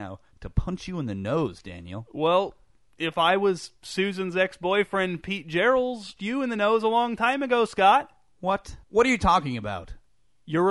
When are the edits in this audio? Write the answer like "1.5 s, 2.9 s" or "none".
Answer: 6.2 s, 8.8 s